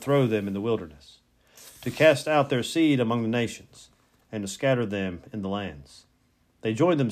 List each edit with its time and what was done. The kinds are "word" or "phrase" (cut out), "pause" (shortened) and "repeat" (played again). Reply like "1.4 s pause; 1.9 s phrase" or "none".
none